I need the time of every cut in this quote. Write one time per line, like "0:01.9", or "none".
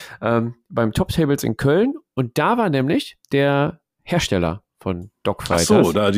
0:03.2
0:05.2